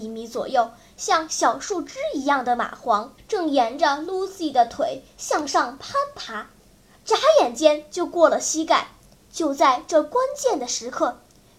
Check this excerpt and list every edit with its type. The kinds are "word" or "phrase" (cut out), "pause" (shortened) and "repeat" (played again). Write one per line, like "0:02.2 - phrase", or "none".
0:03.2 - phrase
0:09.1 - pause